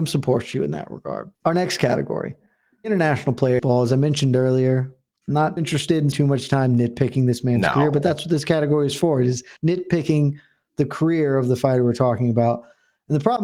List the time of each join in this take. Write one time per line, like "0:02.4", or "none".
0:01.3
0:02.8
0:03.6
0:05.6
0:06.1
0:09.6